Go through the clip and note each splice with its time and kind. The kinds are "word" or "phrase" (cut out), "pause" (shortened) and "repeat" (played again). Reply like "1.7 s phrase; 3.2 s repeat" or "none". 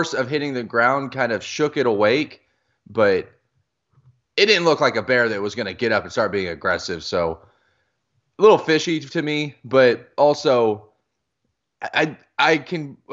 none